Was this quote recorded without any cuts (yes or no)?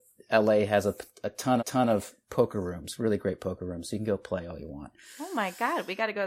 no